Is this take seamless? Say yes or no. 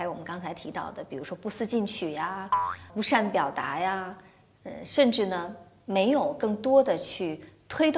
no